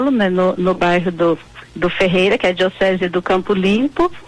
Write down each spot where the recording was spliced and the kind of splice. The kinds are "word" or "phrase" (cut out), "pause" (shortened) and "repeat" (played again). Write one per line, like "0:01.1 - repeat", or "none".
none